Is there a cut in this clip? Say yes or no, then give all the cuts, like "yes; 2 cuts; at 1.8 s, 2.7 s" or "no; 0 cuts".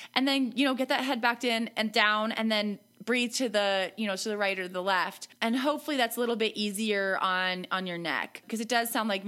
yes; 1 cut; at 5.4 s